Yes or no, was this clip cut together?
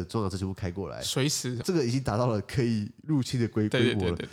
yes